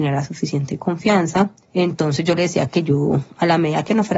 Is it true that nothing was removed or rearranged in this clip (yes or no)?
yes